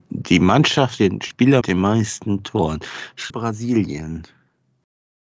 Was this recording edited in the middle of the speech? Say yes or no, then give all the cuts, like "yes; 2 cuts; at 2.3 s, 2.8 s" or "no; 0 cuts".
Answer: yes; 3 cuts; at 1.0 s, 1.6 s, 3.3 s